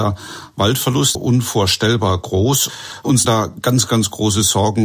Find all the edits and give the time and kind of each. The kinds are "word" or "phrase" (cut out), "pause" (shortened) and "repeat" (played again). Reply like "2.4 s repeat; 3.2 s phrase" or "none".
1.1 s word; 3.2 s word